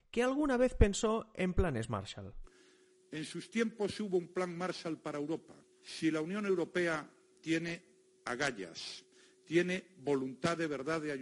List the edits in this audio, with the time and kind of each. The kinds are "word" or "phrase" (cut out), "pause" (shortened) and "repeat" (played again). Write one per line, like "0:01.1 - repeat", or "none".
0:05.7 - pause